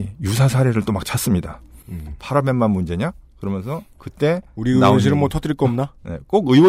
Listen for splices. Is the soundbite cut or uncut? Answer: uncut